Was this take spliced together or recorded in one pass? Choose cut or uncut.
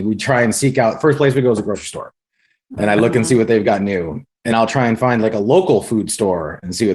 cut